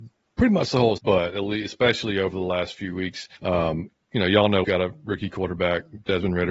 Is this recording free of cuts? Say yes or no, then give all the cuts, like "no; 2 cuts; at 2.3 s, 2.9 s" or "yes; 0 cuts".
no; 3 cuts; at 1.0 s, 3.4 s, 4.6 s